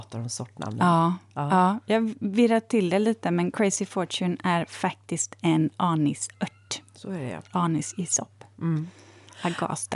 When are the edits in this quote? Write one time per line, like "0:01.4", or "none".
none